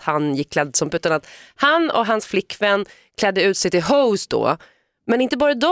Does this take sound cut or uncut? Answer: cut